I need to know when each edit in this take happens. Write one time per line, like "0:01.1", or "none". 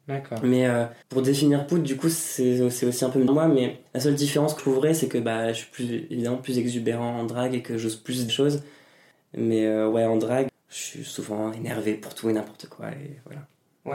0:01.0
0:03.3
0:03.9
0:04.6
0:08.3
0:10.5